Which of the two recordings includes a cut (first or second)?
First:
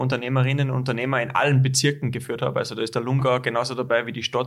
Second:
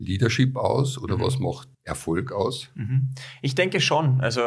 second